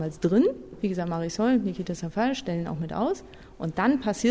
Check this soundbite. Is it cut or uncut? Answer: uncut